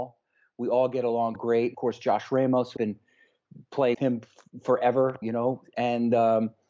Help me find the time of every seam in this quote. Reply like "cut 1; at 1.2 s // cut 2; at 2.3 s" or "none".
cut 1; at 1.4 s // cut 2; at 1.7 s // cut 3; at 2.8 s // cut 4; at 3.9 s // cut 5; at 5.2 s